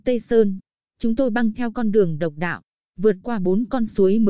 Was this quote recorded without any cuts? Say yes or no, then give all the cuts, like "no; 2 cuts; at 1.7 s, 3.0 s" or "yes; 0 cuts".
yes; 0 cuts